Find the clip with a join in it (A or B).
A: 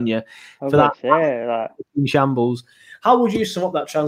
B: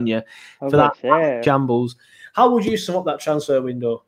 B